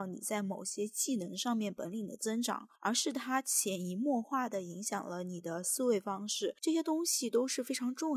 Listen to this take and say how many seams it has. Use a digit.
2